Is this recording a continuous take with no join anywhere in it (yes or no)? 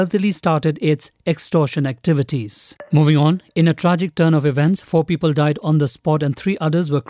no